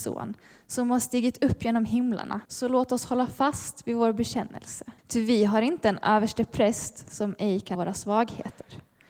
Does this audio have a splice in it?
yes; 3 cuts; at 2.4 s, 5.0 s, 7.8 s

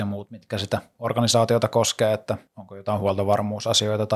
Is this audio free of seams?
no; 1 cut; at 2.5 s

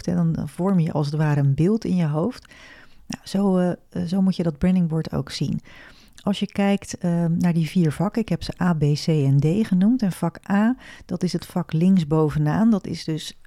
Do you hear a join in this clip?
no; 0 cuts

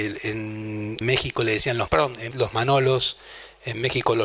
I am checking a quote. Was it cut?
yes; 3 cuts; at 1.0 s, 1.9 s, 2.3 s

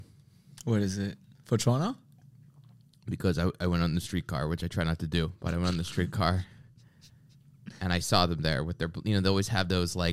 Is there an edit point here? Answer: no; 0 cuts

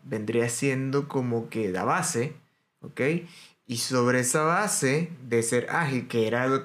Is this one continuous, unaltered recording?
yes; 0 cuts

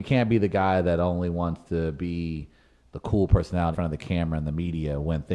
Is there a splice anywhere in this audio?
yes; 1 cut; at 3.7 s

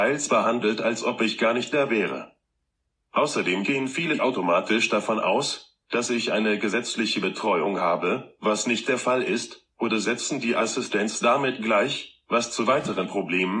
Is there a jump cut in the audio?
no; 0 cuts

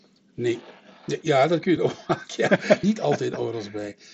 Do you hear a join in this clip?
yes; 2 cuts; at 1.8 s, 2.8 s

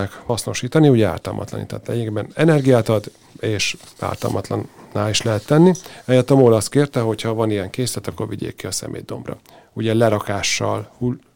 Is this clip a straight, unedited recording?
yes; 0 cuts

